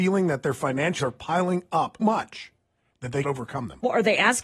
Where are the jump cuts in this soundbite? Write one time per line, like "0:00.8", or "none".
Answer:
0:01.0
0:02.0
0:03.2